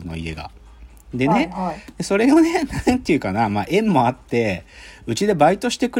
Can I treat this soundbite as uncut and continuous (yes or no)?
yes